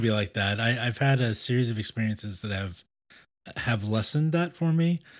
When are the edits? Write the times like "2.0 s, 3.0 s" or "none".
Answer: none

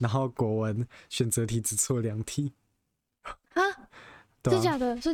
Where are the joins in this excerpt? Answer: none

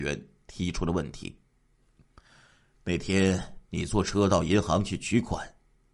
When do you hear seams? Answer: 3.6 s

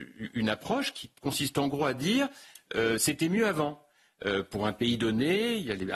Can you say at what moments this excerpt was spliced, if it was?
none

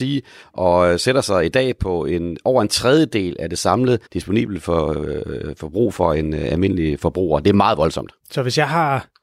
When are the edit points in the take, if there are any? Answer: 4.1 s, 8.2 s

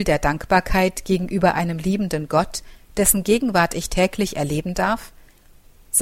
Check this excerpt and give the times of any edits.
none

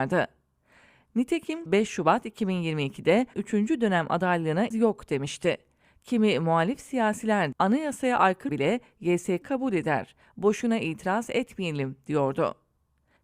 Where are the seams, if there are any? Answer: 1.7 s, 3.3 s, 4.7 s, 7.5 s, 8.5 s, 9.4 s

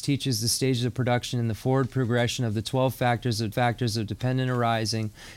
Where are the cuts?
3.5 s

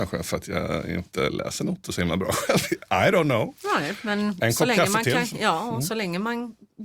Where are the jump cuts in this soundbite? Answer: none

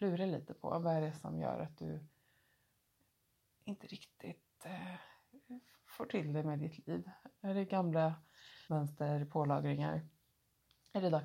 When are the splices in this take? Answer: 8.6 s

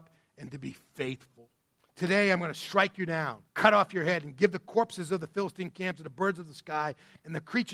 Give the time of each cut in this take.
1.8 s, 3.5 s

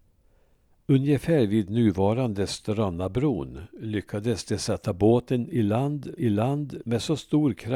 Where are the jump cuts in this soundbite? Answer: 6.2 s

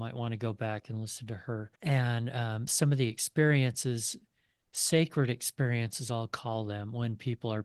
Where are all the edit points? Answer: 1.8 s, 2.7 s

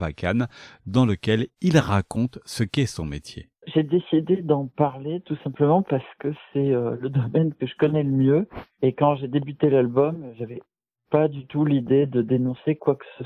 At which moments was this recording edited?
none

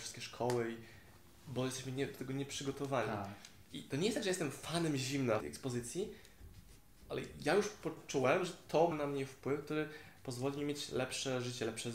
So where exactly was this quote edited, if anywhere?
5.4 s, 8.9 s

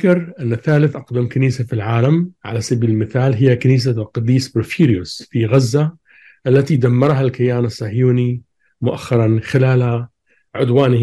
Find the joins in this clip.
none

